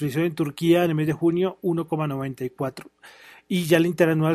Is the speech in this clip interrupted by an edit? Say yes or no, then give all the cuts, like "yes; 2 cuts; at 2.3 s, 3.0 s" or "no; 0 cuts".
no; 0 cuts